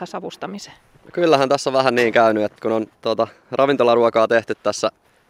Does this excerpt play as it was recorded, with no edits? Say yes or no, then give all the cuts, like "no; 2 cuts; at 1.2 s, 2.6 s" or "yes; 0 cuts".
no; 2 cuts; at 2.6 s, 3.0 s